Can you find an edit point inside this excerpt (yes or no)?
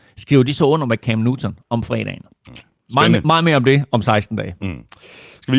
no